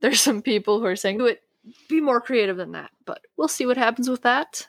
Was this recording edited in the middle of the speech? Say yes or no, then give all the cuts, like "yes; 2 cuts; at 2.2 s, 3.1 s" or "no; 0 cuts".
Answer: yes; 1 cut; at 1.2 s